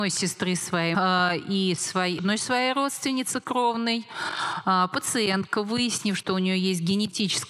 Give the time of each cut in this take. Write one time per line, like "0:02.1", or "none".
0:00.9
0:02.2